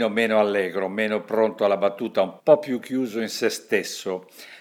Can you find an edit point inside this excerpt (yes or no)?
yes